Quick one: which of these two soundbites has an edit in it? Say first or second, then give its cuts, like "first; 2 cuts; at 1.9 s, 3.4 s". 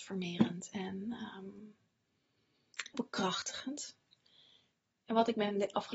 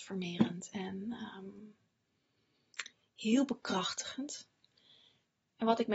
first; 1 cut; at 2.9 s